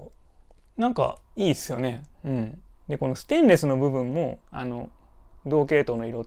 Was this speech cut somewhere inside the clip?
yes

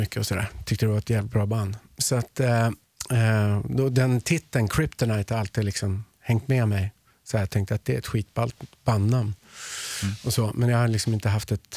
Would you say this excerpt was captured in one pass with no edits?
yes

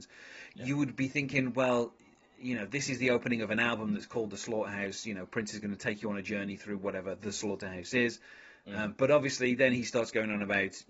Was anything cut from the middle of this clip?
no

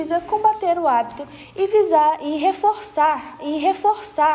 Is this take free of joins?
no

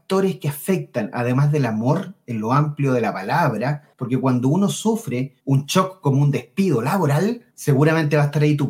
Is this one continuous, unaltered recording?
no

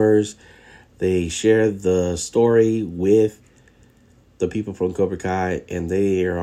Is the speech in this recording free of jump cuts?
yes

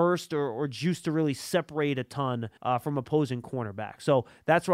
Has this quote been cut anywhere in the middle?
yes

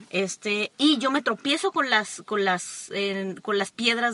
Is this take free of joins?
yes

